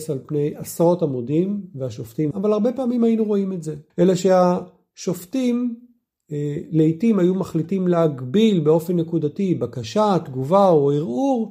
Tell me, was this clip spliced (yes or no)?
yes